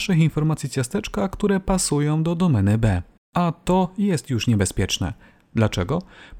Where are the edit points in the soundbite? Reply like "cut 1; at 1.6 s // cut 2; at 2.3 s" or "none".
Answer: none